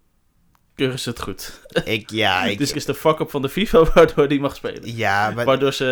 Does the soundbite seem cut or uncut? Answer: cut